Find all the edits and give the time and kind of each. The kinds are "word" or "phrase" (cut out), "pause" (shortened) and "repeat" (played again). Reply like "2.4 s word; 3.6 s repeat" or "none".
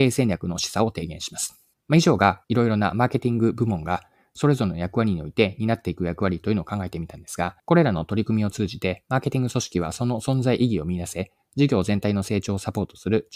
1.7 s pause; 2.4 s pause; 7.6 s pause

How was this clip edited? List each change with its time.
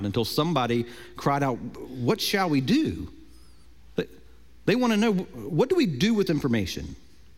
6.3 s word

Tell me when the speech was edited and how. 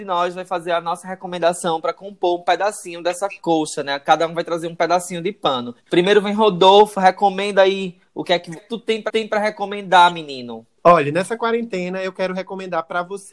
5.8 s pause; 8.6 s phrase; 9.1 s repeat

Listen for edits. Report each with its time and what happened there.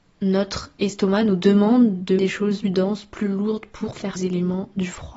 2.2 s word; 2.6 s word; 4.1 s phrase

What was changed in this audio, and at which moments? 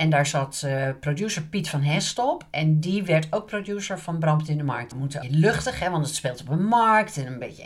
4.9 s phrase; 5.2 s phrase

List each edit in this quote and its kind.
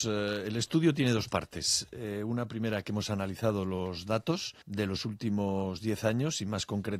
4.6 s pause

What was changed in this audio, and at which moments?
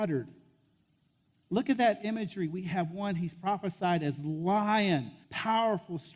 5.2 s pause

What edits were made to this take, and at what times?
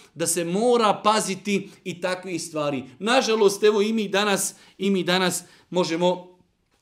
none

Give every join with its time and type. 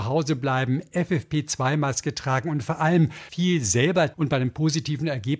3.3 s word; 4.1 s word

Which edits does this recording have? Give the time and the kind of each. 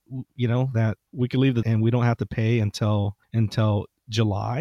1.1 s pause; 1.6 s word; 3.2 s pause

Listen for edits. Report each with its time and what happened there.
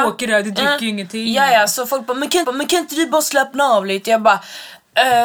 2.4 s repeat

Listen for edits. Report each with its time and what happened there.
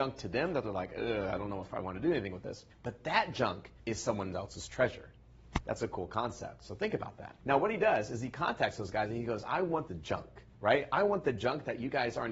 2.7 s pause; 3.8 s pause; 7.4 s pause; 9.9 s phrase; 10.5 s pause

